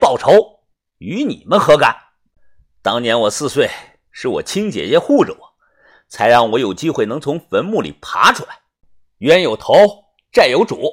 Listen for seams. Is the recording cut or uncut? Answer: uncut